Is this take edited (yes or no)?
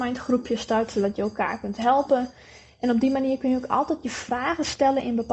no